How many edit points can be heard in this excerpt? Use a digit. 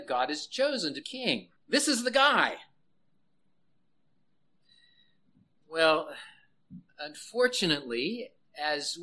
3